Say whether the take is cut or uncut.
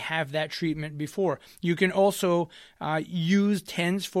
uncut